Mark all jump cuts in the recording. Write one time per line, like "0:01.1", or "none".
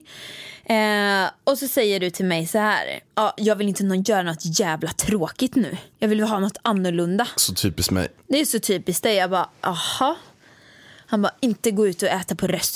0:03.1
0:05.9